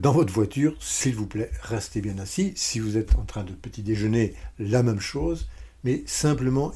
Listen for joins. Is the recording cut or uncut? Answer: uncut